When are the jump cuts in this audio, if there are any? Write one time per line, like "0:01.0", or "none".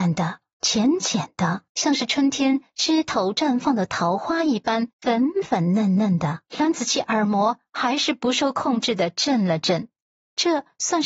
0:01.7
0:04.9
0:06.5